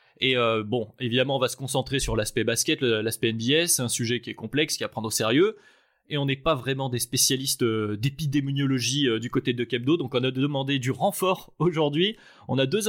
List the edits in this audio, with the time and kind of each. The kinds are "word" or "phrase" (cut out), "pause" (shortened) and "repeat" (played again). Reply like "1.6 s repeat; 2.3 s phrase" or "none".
none